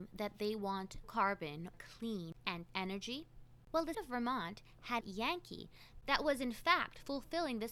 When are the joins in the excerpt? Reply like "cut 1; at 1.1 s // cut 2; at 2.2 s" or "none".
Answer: cut 1; at 1.0 s // cut 2; at 1.7 s // cut 3; at 2.7 s // cut 4; at 3.9 s // cut 5; at 5.0 s